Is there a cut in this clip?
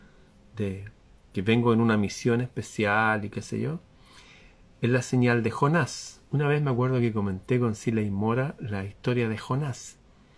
yes; 1 cut; at 6.3 s

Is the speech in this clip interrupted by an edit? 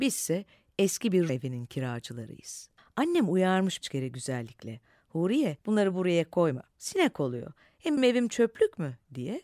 yes; 6 cuts; at 1.3 s, 2.8 s, 3.8 s, 5.6 s, 6.7 s, 8.0 s

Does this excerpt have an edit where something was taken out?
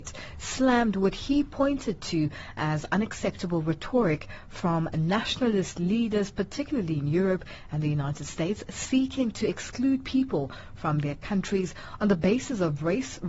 no; 0 cuts

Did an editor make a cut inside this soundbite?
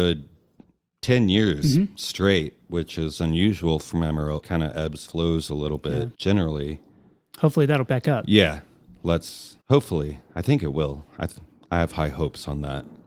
yes; 5 cuts; at 4.4 s, 5.1 s, 6.1 s, 7.9 s, 9.6 s

